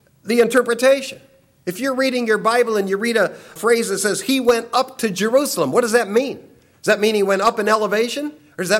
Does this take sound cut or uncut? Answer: uncut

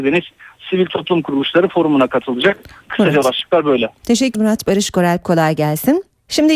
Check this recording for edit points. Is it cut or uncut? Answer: cut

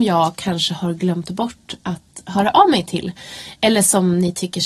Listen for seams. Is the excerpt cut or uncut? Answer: uncut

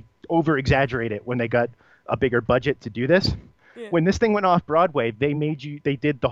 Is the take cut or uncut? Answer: uncut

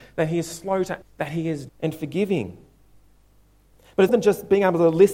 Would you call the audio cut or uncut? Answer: cut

